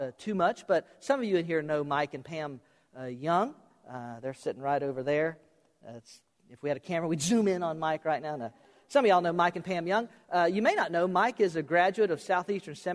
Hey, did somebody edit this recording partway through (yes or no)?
no